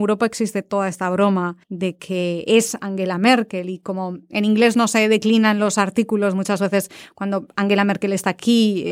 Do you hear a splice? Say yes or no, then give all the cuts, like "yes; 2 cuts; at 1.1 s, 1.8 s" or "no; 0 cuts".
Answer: yes; 1 cut; at 1.6 s